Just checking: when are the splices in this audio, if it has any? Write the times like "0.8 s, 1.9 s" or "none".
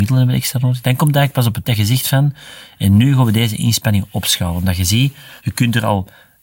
1.7 s, 5.4 s